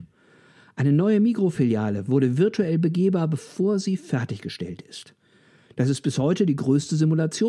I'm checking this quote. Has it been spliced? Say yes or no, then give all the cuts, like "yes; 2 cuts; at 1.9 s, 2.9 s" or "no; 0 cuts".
no; 0 cuts